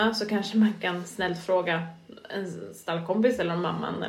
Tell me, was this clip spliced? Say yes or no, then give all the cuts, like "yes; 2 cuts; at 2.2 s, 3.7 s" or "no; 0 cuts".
no; 0 cuts